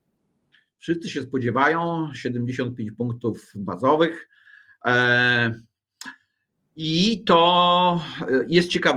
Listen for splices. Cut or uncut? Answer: uncut